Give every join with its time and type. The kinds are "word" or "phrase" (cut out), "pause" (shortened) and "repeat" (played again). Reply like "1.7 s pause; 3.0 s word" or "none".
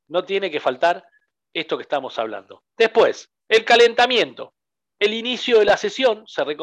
3.4 s pause